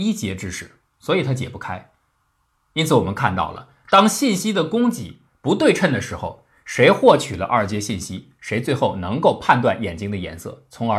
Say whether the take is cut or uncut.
uncut